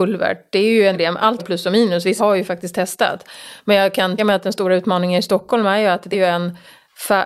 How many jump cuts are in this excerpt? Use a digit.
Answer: 5